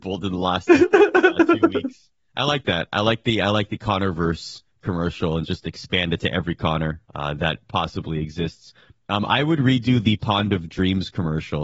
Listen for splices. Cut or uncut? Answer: cut